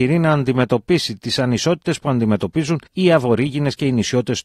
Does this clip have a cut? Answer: yes; 1 cut; at 2.9 s

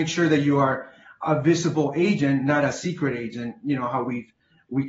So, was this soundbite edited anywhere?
no; 0 cuts

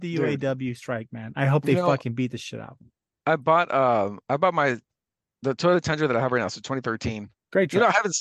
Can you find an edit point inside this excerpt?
no; 0 cuts

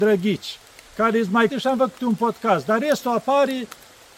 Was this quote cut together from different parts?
yes; 1 cut; at 1.5 s

